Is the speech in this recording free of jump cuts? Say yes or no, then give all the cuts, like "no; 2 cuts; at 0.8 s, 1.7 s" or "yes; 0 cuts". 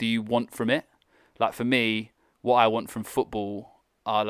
yes; 0 cuts